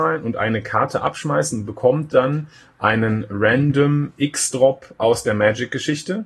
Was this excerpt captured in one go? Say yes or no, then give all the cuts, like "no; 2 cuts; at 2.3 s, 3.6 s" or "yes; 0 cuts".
yes; 0 cuts